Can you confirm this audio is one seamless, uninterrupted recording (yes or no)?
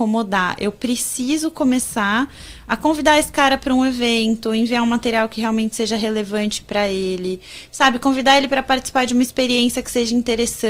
yes